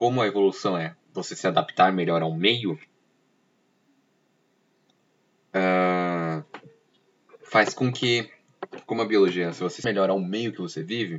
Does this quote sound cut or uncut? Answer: cut